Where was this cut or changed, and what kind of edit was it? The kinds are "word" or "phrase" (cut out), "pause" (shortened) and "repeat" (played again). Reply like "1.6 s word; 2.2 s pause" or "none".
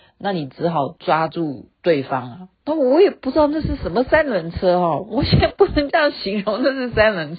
2.5 s pause